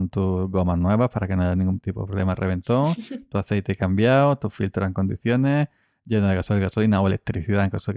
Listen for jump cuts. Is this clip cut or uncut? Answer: uncut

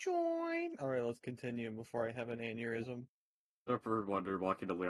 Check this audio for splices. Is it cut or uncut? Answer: uncut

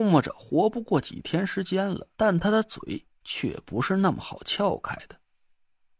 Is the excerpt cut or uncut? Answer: cut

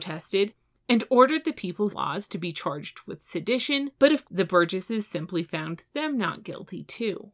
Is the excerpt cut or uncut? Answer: cut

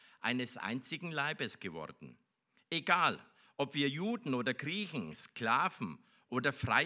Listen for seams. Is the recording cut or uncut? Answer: uncut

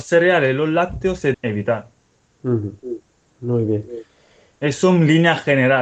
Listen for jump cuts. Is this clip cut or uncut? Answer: cut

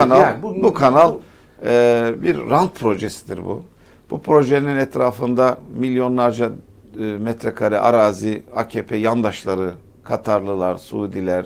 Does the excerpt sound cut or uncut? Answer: uncut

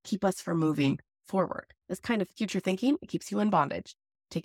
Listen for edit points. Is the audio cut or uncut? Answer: cut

